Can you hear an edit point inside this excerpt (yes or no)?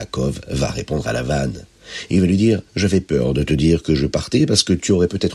yes